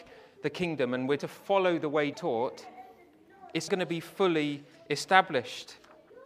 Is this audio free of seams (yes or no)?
no